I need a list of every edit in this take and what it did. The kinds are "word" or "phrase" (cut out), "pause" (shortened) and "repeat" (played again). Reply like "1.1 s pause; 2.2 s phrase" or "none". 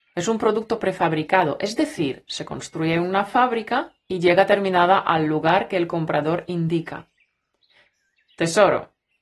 none